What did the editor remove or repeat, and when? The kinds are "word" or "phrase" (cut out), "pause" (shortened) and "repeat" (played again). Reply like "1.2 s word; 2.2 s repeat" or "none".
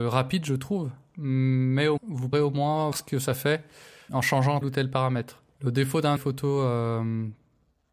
2.0 s word; 2.3 s word; 2.9 s word; 4.1 s word; 4.6 s word; 6.2 s word